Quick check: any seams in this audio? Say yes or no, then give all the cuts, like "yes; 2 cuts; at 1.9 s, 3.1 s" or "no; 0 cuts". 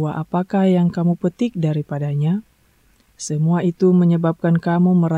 no; 0 cuts